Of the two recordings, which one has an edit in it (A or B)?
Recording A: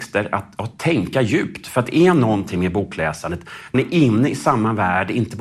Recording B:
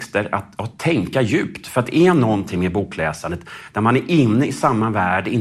A